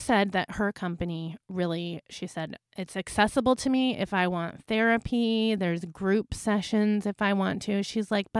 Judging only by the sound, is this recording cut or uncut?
cut